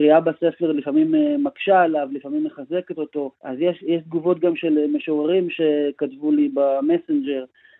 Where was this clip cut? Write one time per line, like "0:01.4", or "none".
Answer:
0:03.4